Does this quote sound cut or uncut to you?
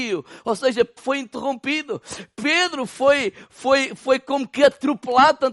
cut